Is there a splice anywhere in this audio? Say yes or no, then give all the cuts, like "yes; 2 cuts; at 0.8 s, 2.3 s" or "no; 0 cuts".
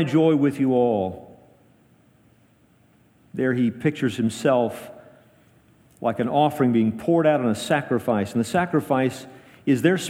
no; 0 cuts